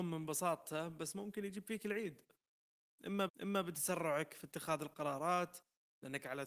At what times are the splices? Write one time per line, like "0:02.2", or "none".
0:03.3

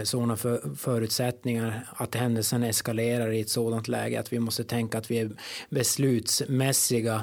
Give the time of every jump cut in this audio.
none

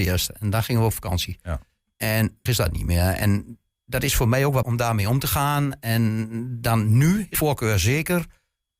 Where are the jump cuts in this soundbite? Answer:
0:02.5
0:04.6
0:07.3

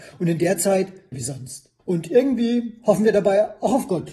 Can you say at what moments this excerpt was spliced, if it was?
0:01.1
0:01.8

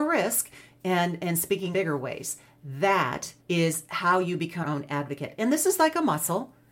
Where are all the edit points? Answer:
0:01.7
0:03.4
0:04.6

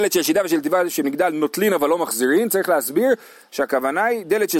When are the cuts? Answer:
none

